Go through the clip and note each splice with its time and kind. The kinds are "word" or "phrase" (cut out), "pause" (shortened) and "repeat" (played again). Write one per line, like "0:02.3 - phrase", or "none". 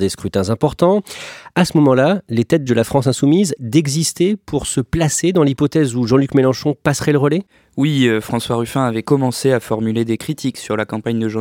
0:02.7 - word
0:03.6 - word